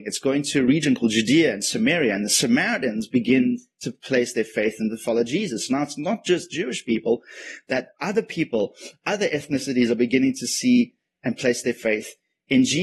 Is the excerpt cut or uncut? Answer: uncut